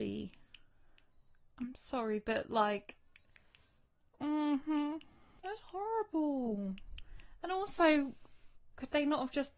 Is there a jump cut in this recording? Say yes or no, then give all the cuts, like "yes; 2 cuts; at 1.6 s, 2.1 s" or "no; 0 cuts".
no; 0 cuts